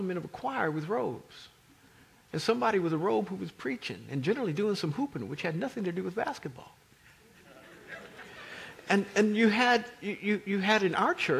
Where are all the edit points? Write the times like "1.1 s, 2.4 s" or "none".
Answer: none